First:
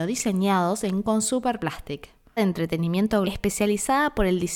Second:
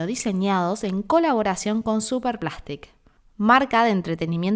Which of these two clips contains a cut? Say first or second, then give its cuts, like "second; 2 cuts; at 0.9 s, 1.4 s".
first; 3 cuts; at 1.0 s, 2.4 s, 3.2 s